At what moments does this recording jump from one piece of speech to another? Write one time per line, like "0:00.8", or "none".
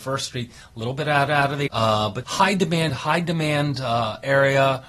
0:01.3
0:01.7
0:02.2
0:02.9